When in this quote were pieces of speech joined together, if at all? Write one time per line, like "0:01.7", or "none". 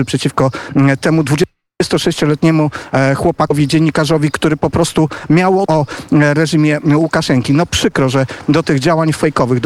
0:05.6